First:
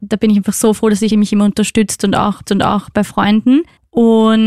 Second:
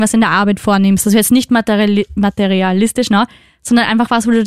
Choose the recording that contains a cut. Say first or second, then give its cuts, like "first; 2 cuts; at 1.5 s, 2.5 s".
first; 2 cuts; at 1.1 s, 2.4 s